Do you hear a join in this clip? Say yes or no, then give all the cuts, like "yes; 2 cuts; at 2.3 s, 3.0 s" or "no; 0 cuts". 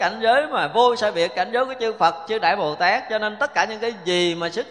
no; 0 cuts